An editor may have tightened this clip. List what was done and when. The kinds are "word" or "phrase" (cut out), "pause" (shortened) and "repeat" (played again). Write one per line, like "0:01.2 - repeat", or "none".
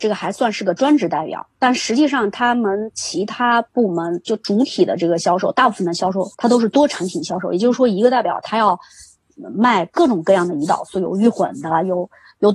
0:01.5 - pause
0:06.3 - pause